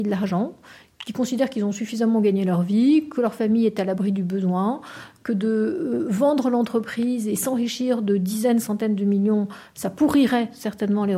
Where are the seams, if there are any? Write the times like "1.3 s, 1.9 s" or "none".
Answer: none